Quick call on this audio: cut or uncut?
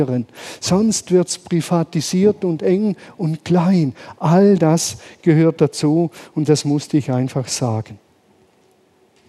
uncut